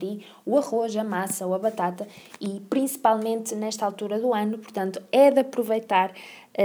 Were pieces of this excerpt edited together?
no; 0 cuts

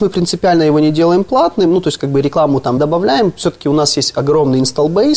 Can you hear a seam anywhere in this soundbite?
yes; 1 cut; at 2.8 s

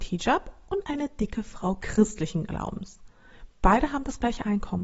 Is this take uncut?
yes; 0 cuts

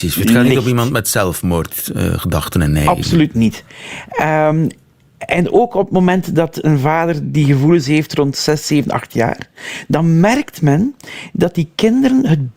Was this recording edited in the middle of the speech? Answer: no; 0 cuts

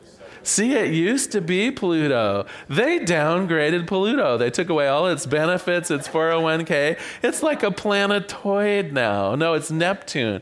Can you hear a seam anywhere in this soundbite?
no; 0 cuts

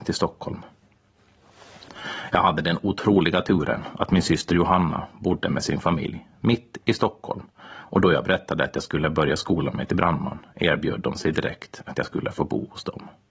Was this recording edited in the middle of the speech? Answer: no; 0 cuts

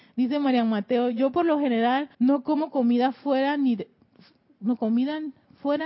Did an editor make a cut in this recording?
yes; 2 cuts; at 2.1 s, 4.8 s

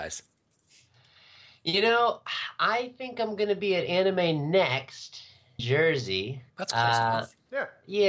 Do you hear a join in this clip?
yes; 2 cuts; at 5.6 s, 6.5 s

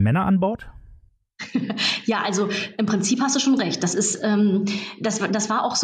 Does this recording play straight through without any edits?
yes; 0 cuts

